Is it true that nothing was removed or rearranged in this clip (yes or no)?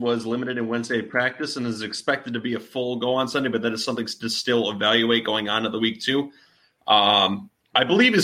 yes